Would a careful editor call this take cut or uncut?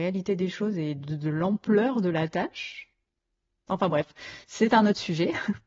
uncut